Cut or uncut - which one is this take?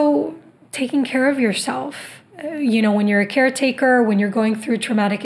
cut